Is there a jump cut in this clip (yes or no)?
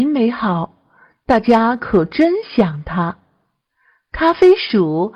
no